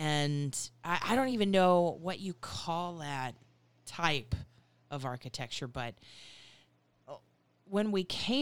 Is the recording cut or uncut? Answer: uncut